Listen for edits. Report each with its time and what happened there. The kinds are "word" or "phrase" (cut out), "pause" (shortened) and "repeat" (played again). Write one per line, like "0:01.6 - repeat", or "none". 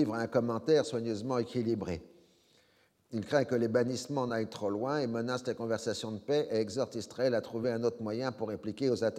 none